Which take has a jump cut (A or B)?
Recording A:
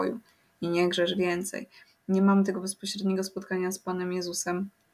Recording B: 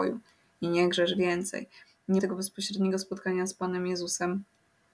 B